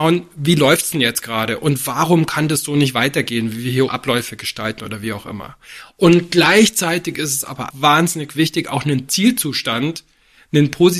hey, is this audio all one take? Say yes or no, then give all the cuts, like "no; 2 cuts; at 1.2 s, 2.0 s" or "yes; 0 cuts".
no; 2 cuts; at 3.9 s, 7.7 s